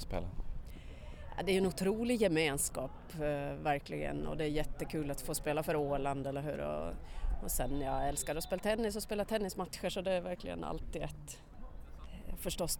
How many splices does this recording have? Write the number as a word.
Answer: zero